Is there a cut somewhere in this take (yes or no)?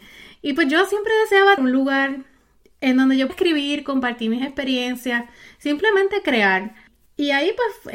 yes